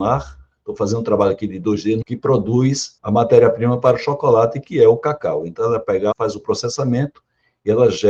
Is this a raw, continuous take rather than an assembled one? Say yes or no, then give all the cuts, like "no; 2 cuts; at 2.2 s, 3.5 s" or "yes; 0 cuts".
no; 3 cuts; at 2.0 s, 3.0 s, 6.1 s